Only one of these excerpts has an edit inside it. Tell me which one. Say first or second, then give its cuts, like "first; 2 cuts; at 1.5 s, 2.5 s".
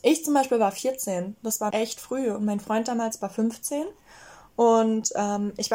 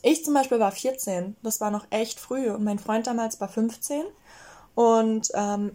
first; 1 cut; at 1.7 s